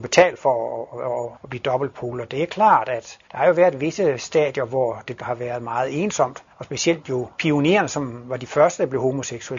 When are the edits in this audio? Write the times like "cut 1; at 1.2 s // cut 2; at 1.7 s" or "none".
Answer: cut 1; at 1.3 s // cut 2; at 3.2 s // cut 3; at 5.2 s // cut 4; at 6.5 s // cut 5; at 7.3 s